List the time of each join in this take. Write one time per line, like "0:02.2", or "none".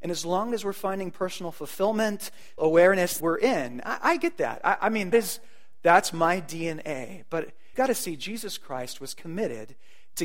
0:02.6
0:03.2
0:05.1
0:07.7